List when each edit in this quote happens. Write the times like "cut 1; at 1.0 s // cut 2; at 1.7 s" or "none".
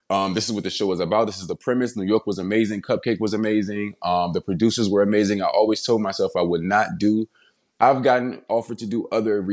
none